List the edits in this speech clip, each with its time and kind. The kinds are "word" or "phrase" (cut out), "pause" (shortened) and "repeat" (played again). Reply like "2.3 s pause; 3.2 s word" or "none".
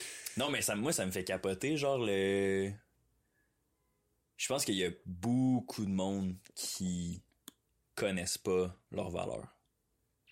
8.8 s pause